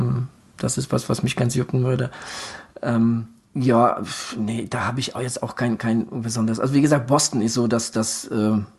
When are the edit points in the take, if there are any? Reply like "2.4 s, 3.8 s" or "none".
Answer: 3.4 s